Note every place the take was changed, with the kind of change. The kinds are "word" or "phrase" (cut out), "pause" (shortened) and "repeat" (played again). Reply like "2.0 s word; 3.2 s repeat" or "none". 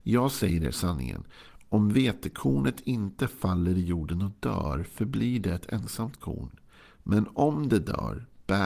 none